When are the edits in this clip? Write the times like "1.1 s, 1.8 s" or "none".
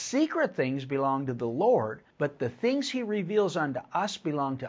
2.1 s

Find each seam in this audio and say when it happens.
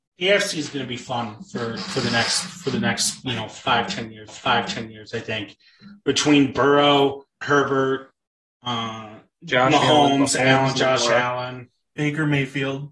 4.3 s, 7.4 s

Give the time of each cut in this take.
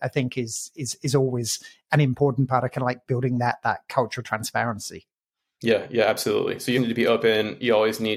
6.7 s

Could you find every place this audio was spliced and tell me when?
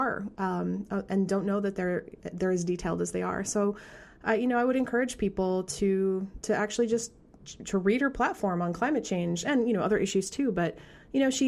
none

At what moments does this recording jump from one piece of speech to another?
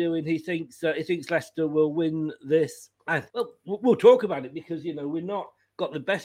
3.0 s, 3.3 s

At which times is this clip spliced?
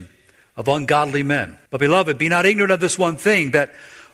1.7 s

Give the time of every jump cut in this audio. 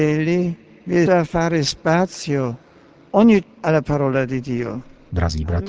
1.1 s, 3.4 s

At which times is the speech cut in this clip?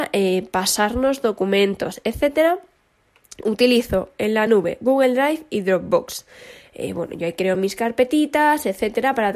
none

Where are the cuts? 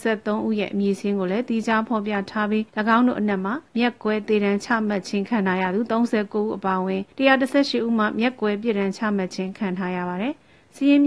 2.7 s, 3.7 s, 7.1 s

